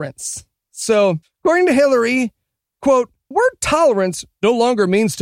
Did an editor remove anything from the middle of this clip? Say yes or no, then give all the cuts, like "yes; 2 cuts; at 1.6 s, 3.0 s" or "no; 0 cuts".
yes; 2 cuts; at 1.2 s, 3.3 s